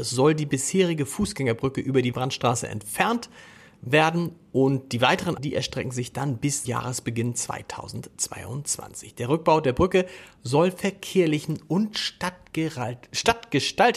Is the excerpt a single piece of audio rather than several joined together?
no; 3 cuts; at 2.1 s, 5.4 s, 6.6 s

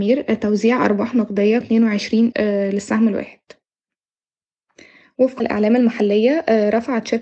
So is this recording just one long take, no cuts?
no; 3 cuts; at 1.6 s, 2.3 s, 5.4 s

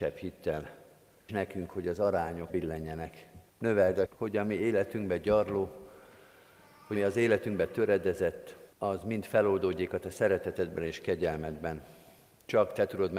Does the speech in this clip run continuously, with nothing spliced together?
no; 6 cuts; at 1.3 s, 2.5 s, 3.5 s, 4.1 s, 7.0 s, 8.7 s

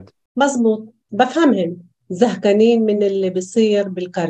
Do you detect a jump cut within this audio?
no; 0 cuts

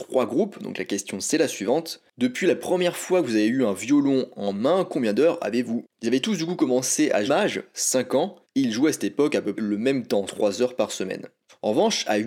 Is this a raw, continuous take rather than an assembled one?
no; 5 cuts; at 5.8 s, 7.3 s, 8.4 s, 9.6 s, 10.3 s

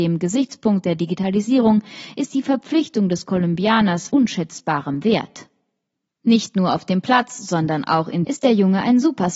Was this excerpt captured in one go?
no; 2 cuts; at 4.1 s, 8.2 s

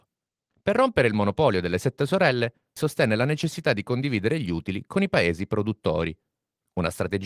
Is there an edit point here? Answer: yes; 1 cut; at 2.8 s

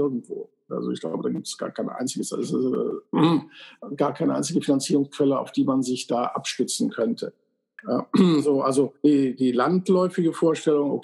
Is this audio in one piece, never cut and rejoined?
no; 2 cuts; at 3.1 s, 9.0 s

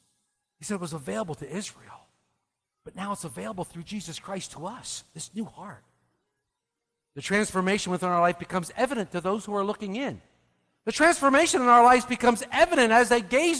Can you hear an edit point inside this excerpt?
no; 0 cuts

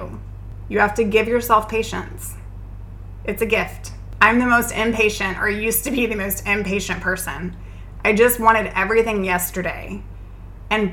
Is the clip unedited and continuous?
yes; 0 cuts

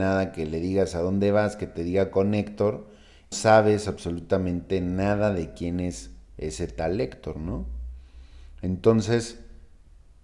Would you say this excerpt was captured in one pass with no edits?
no; 1 cut; at 3.3 s

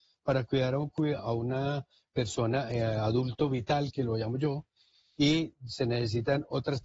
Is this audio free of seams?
no; 1 cut; at 1.2 s

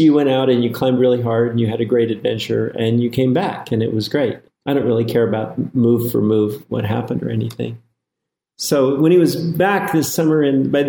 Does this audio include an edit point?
no; 0 cuts

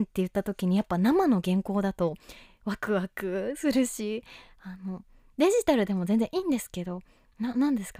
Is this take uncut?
yes; 0 cuts

